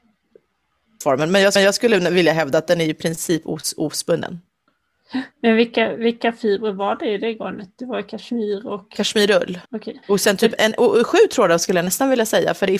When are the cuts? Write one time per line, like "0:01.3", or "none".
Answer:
0:01.6
0:05.3
0:09.6
0:10.0
0:10.6